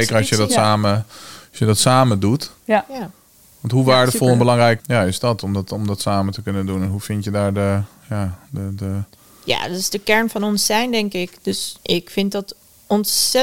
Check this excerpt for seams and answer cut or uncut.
cut